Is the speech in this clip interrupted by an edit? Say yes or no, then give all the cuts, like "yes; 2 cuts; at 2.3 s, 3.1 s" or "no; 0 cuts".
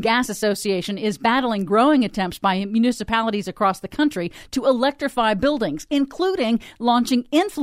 no; 0 cuts